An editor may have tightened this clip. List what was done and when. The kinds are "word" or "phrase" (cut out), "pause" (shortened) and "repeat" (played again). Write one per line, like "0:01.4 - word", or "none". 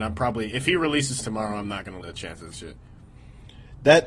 0:01.2 - word
0:02.0 - word
0:02.5 - word